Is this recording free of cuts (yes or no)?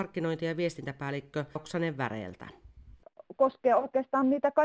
no